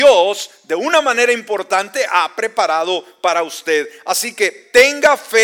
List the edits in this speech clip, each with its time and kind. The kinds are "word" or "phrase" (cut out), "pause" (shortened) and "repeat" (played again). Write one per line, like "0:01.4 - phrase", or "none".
none

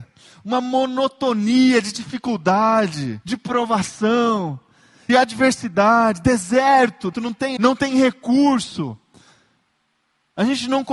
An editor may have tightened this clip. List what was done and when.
0:03.2 - pause
0:05.1 - word
0:07.1 - word
0:07.6 - word

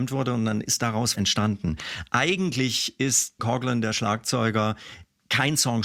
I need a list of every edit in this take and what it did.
0:01.1 - word
0:03.4 - word

